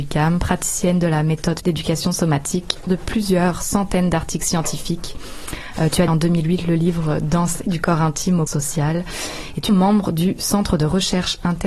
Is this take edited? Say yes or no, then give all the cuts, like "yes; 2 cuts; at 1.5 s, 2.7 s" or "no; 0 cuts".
yes; 6 cuts; at 1.6 s, 2.9 s, 6.1 s, 7.6 s, 8.5 s, 9.7 s